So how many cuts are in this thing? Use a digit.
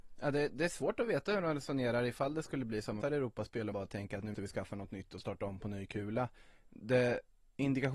3